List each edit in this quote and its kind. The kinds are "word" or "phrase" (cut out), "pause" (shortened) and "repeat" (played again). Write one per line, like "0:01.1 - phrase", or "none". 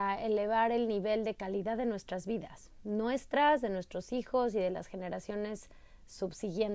none